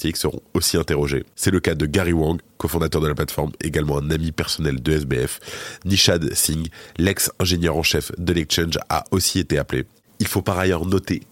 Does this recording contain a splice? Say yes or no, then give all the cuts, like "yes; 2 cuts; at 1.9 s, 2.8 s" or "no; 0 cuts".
no; 0 cuts